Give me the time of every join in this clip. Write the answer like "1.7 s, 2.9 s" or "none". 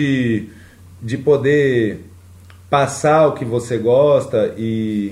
none